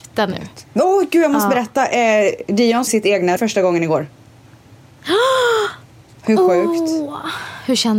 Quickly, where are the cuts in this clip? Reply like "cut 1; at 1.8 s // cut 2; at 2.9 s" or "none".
cut 1; at 2.9 s // cut 2; at 3.4 s